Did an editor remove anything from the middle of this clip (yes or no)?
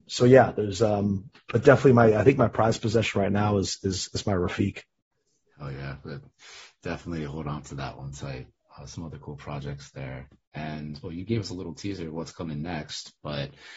no